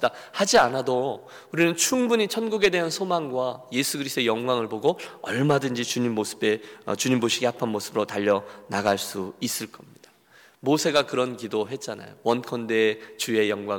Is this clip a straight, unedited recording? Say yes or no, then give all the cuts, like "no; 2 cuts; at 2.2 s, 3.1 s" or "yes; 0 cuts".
yes; 0 cuts